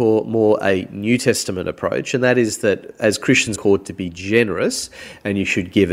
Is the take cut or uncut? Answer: cut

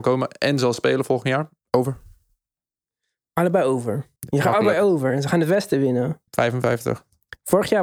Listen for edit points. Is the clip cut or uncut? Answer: cut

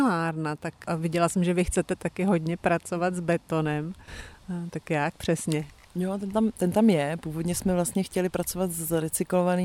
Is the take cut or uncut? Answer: uncut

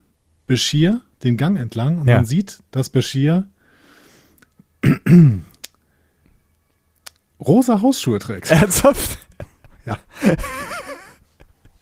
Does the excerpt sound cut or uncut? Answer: uncut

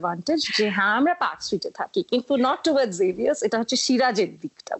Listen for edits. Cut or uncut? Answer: uncut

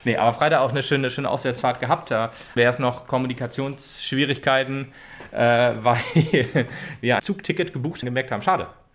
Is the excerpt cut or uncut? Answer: cut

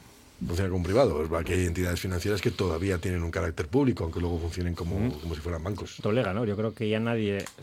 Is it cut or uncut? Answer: cut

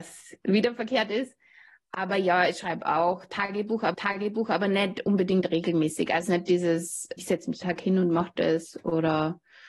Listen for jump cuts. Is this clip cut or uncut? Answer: cut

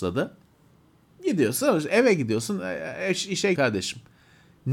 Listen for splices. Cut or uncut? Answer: cut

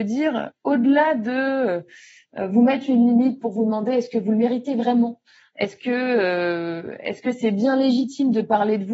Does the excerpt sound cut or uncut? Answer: uncut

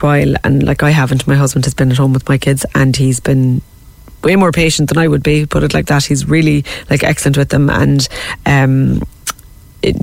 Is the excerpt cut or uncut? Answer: uncut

